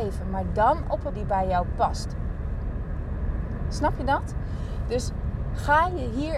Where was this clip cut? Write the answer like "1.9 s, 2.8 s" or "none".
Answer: 1.1 s